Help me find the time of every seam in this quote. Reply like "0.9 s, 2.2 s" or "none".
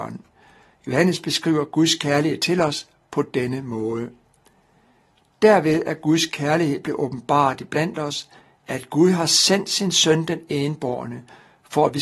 none